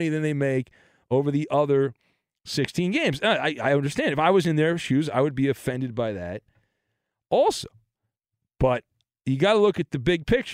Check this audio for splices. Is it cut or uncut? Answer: uncut